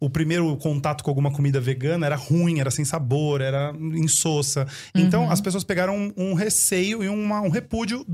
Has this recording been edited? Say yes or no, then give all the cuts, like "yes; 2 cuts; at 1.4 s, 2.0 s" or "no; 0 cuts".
no; 0 cuts